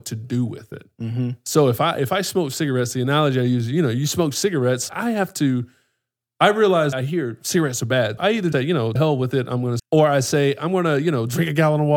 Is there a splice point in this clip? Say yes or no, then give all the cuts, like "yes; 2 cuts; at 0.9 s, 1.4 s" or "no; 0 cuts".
yes; 6 cuts; at 4.9 s, 6.9 s, 8.2 s, 8.5 s, 9.0 s, 9.8 s